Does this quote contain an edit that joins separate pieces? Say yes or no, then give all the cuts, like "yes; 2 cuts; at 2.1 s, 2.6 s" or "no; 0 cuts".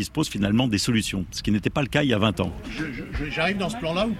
no; 0 cuts